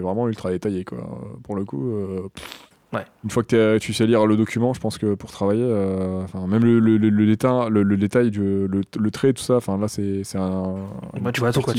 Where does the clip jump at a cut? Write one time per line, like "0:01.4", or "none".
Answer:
none